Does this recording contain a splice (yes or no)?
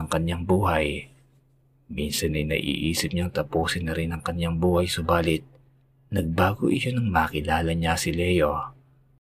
no